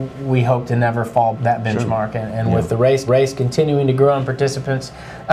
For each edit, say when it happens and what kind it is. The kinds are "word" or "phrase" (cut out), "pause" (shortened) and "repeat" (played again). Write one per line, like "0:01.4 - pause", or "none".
0:01.3 - word
0:03.1 - repeat

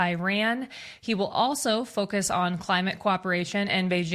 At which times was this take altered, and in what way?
none

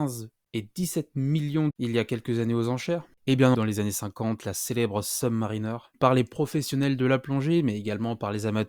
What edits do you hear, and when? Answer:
0:01.7 - word
0:03.5 - word
0:05.9 - word

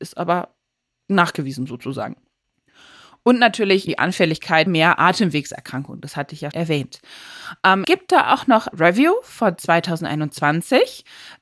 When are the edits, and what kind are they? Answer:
0:03.9 - word
0:04.7 - word
0:06.5 - word
0:07.8 - word
0:08.7 - word

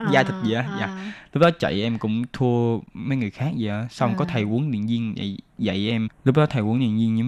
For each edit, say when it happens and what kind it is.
0:06.1 - pause

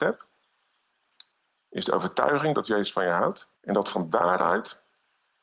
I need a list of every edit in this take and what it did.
0:03.6 - pause

